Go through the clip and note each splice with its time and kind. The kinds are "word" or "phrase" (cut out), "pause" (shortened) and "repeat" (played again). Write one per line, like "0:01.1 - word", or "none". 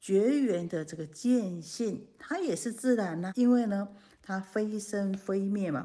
0:03.3 - word